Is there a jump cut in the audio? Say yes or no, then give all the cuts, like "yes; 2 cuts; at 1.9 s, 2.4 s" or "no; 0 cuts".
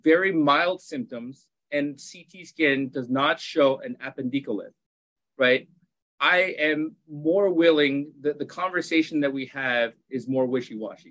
no; 0 cuts